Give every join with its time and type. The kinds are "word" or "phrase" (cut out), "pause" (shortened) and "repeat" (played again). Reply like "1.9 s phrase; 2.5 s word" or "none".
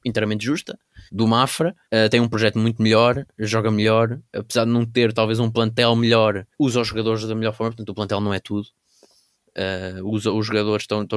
1.1 s pause; 1.8 s pause; 4.3 s pause; 6.5 s pause